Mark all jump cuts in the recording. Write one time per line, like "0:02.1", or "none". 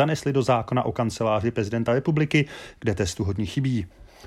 none